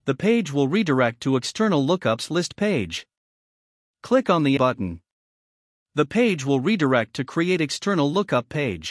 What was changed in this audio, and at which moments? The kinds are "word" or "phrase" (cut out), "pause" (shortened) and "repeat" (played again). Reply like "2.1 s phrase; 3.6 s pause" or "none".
4.6 s word